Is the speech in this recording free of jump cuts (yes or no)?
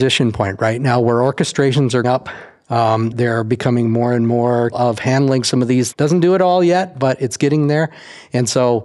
no